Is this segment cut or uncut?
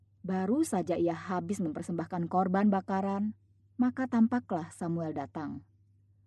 uncut